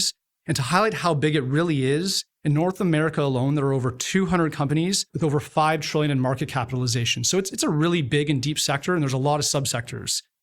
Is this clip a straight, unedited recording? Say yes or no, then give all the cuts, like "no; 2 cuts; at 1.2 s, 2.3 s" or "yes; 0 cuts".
no; 1 cut; at 5.1 s